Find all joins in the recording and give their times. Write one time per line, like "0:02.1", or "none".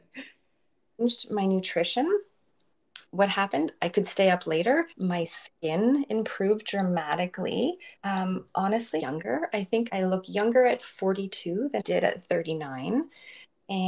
0:04.9
0:08.0
0:09.0
0:09.9
0:11.8